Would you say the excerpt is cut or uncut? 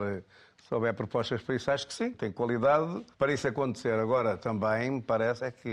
cut